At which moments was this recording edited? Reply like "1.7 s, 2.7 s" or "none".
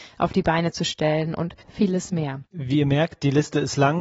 1.6 s, 2.5 s